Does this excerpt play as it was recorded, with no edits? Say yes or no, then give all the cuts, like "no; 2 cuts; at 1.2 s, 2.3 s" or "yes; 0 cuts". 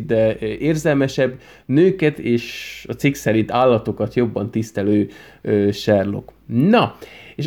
yes; 0 cuts